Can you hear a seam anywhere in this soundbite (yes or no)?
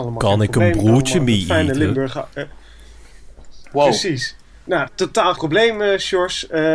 yes